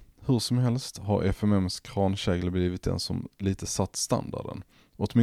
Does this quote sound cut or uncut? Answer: uncut